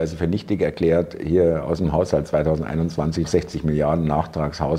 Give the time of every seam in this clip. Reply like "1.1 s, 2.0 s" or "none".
3.2 s